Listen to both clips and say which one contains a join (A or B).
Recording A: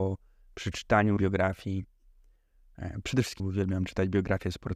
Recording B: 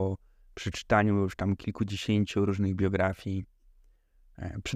A